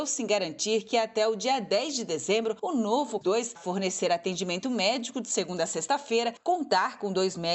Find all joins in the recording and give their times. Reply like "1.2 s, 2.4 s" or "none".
3.2 s, 3.6 s